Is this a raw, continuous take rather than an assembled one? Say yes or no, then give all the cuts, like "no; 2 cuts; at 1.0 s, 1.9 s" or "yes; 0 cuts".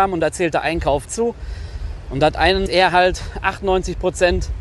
no; 2 cuts; at 1.0 s, 2.7 s